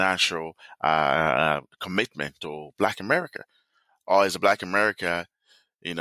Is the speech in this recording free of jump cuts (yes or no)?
yes